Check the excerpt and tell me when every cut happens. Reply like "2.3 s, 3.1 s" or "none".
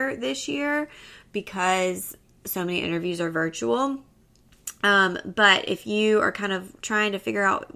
none